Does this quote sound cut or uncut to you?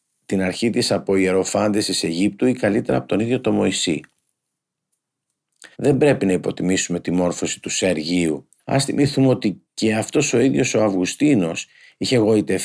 cut